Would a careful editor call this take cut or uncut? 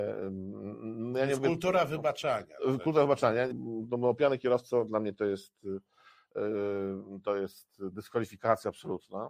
cut